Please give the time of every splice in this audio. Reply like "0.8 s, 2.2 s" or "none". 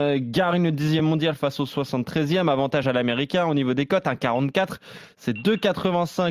none